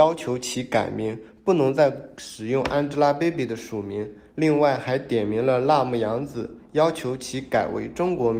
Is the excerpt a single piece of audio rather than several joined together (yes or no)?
yes